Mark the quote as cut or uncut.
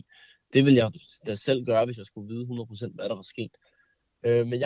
uncut